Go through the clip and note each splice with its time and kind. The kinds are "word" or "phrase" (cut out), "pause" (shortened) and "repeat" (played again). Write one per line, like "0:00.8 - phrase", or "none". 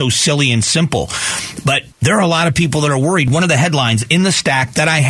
0:01.9 - pause